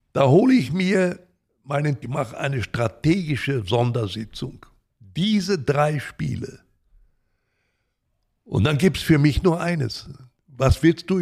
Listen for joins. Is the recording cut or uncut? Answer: cut